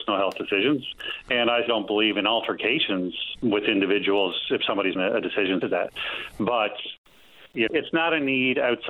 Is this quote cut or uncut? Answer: cut